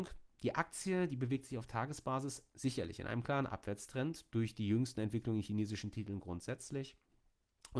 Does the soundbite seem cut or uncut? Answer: uncut